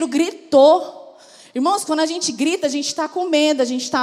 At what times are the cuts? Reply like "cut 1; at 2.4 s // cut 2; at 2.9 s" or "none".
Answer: none